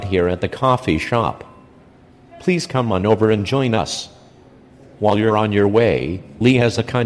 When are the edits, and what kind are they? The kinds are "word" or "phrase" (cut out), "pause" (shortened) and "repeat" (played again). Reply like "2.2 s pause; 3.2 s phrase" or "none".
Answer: none